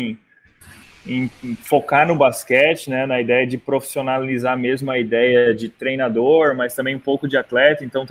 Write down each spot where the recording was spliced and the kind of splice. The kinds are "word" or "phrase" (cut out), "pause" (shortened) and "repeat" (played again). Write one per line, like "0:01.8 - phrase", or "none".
none